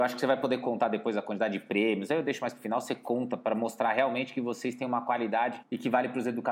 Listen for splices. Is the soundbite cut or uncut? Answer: cut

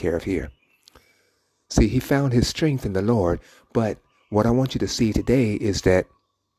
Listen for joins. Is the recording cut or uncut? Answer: uncut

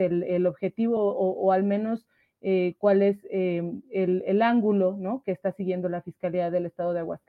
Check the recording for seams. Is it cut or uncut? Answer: uncut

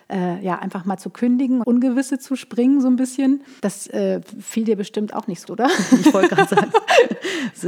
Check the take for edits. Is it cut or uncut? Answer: cut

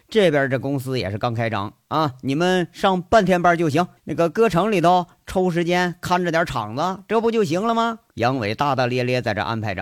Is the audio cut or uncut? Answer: cut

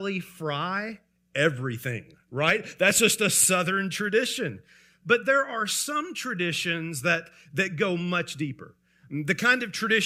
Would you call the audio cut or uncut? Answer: uncut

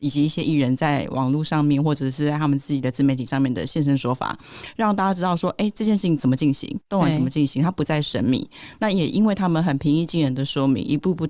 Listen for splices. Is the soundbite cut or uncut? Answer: cut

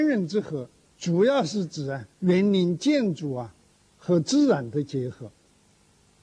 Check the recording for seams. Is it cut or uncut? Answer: cut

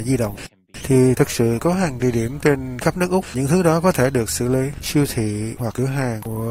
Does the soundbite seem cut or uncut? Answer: cut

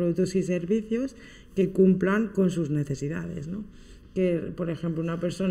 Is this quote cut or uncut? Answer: uncut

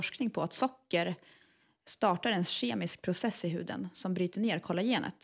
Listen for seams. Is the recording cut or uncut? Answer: uncut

